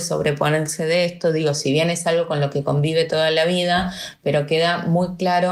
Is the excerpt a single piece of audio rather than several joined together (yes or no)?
yes